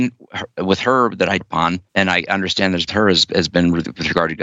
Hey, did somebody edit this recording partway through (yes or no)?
yes